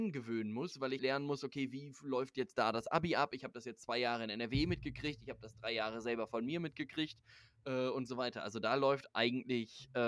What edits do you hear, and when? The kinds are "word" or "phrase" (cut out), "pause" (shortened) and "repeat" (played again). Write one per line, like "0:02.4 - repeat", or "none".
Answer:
0:01.0 - word